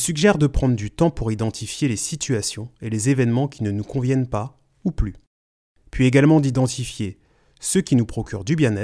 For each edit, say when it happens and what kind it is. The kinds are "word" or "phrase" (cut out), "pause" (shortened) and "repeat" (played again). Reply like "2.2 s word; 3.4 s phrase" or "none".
none